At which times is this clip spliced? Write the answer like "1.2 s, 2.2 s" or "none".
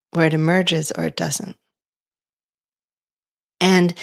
none